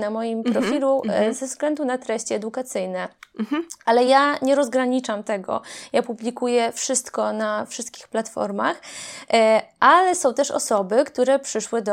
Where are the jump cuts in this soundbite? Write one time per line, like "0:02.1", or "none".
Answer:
none